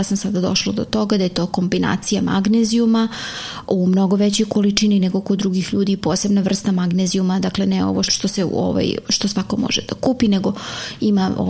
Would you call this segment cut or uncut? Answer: cut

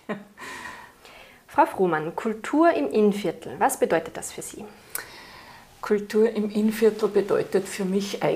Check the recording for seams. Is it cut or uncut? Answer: uncut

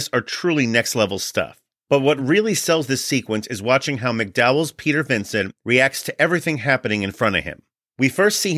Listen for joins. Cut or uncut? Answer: uncut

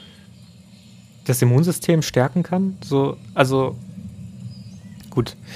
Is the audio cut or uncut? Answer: uncut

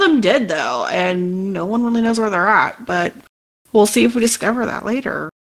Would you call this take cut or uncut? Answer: uncut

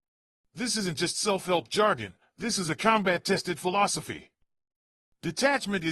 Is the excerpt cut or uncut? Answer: uncut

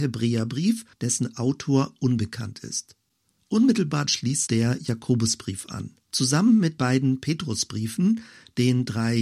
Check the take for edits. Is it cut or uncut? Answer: cut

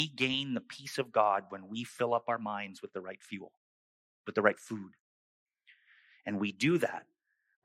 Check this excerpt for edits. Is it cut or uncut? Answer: uncut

